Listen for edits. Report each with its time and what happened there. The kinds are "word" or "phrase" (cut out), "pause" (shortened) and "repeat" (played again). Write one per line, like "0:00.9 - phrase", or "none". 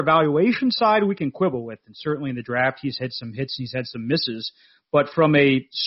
none